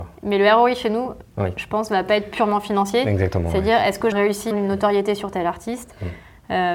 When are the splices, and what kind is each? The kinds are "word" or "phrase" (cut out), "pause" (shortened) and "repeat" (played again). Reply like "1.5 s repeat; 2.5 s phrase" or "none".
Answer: 1.3 s pause; 4.1 s phrase; 4.5 s phrase